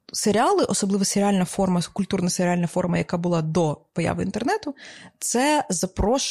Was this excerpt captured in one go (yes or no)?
yes